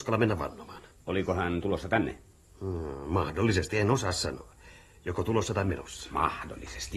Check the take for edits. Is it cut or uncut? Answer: uncut